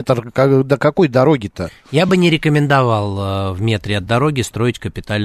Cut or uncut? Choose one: uncut